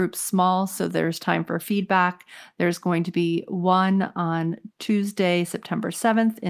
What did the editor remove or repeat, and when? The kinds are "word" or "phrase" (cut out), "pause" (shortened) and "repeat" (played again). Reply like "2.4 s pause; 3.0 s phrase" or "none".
4.7 s pause